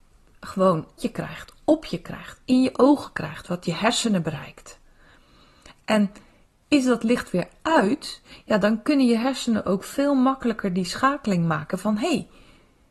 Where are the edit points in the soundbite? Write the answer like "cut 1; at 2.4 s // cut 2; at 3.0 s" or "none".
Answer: cut 1; at 1.0 s